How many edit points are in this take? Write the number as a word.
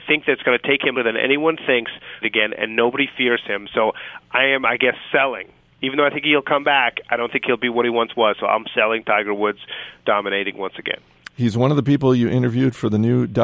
two